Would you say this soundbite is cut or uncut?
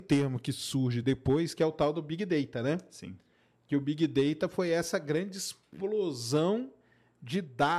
uncut